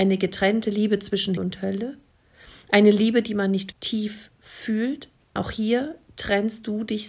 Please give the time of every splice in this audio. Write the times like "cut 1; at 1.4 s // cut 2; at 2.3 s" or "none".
cut 1; at 1.4 s // cut 2; at 3.7 s // cut 3; at 5.4 s

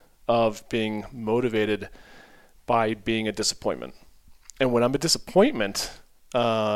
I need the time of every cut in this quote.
none

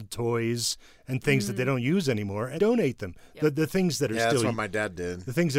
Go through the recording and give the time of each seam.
cut 1; at 2.6 s

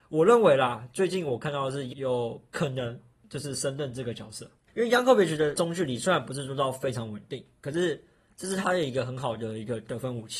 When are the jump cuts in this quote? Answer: cut 1; at 1.9 s

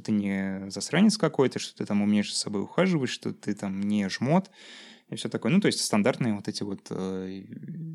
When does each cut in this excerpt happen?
none

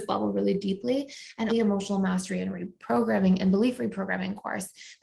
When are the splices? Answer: cut 1; at 1.5 s

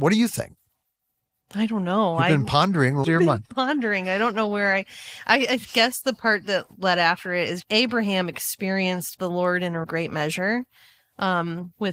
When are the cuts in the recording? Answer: cut 1; at 3.0 s // cut 2; at 7.6 s // cut 3; at 9.8 s

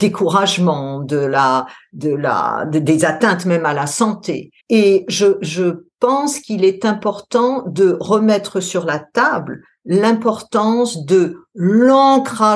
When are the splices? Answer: cut 1; at 4.6 s

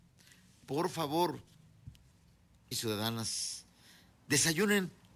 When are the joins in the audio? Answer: cut 1; at 2.7 s

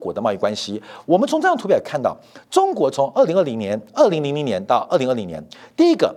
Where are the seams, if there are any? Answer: cut 1; at 3.9 s

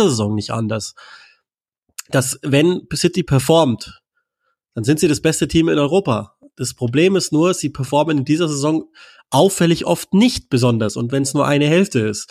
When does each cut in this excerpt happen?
none

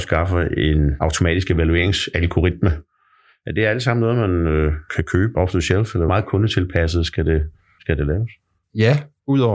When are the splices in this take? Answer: none

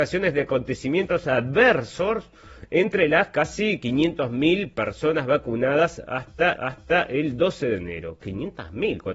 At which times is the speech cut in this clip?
cut 1; at 6.6 s

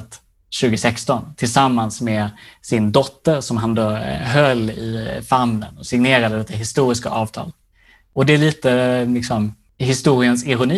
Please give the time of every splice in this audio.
none

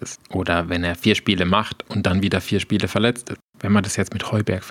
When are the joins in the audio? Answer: cut 1; at 3.5 s

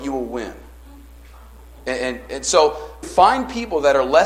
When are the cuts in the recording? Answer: cut 1; at 3.0 s

